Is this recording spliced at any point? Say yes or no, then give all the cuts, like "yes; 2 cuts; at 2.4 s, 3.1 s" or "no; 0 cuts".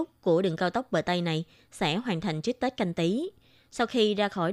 no; 0 cuts